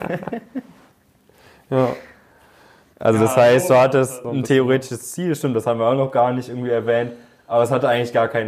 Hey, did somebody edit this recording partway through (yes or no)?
no